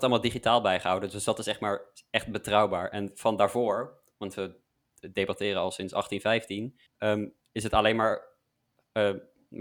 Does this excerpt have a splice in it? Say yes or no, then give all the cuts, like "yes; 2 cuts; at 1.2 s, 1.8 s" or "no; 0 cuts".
yes; 1 cut; at 6.9 s